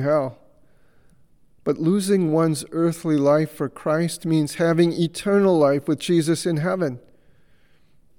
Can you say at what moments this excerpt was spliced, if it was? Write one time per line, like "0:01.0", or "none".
none